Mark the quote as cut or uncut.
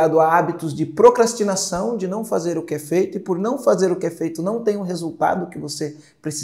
uncut